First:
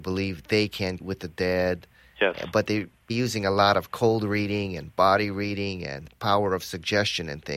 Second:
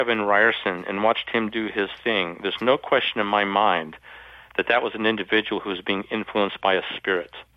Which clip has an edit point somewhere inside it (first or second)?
first